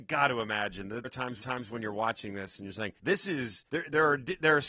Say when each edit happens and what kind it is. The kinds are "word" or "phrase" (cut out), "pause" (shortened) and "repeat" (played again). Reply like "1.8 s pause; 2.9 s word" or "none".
1.0 s word; 1.4 s repeat; 3.0 s pause; 3.7 s pause

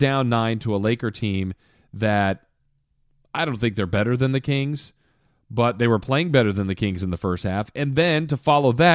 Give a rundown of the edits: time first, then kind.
none

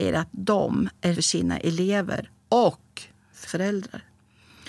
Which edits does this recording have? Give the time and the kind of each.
1.1 s phrase; 2.4 s pause; 3.5 s word

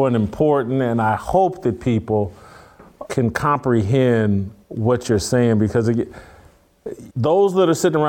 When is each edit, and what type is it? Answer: 3.1 s word; 4.6 s pause; 7.1 s pause

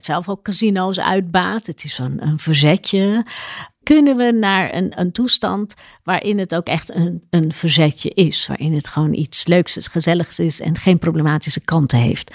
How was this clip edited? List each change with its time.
none

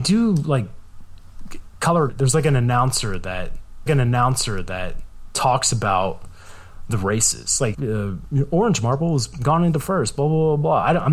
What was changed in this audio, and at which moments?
2.1 s phrase; 3.9 s repeat; 7.7 s word

